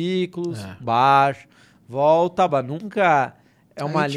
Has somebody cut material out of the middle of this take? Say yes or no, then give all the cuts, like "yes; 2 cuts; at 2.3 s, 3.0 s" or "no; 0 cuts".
no; 0 cuts